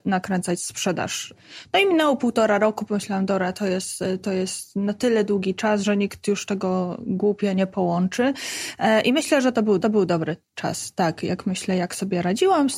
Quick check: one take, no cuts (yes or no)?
no